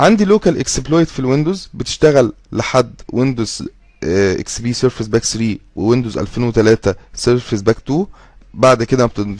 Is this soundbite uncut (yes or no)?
yes